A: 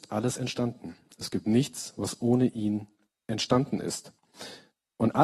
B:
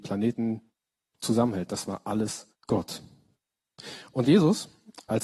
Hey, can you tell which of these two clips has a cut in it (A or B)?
B